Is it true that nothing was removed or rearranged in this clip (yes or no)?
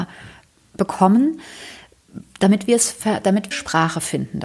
no